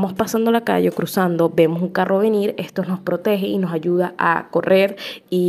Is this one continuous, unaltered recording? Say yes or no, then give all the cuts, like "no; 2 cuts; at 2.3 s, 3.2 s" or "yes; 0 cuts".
yes; 0 cuts